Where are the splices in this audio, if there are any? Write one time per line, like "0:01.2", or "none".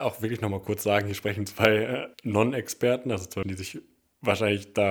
0:02.1
0:03.4